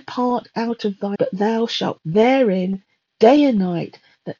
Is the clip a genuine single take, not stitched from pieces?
no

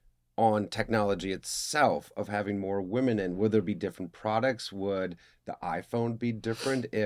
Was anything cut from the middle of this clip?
no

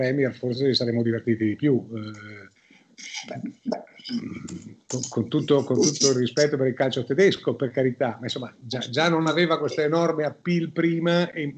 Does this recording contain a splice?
no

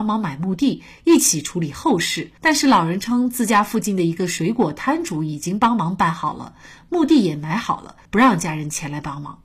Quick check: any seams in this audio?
yes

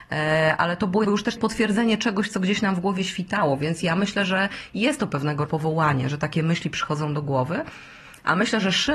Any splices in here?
yes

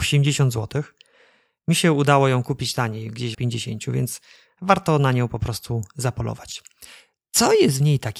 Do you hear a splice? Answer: yes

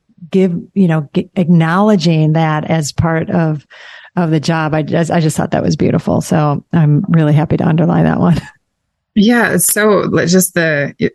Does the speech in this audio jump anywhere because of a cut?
no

